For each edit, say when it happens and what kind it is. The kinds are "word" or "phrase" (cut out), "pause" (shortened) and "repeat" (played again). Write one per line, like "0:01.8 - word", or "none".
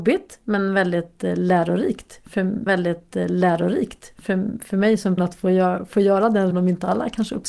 0:02.7 - repeat
0:05.2 - word
0:06.5 - phrase